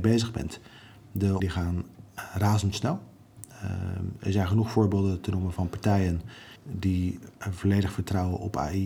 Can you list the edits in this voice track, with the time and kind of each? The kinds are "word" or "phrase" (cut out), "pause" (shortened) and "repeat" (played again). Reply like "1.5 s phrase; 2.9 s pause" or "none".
1.4 s word; 6.6 s pause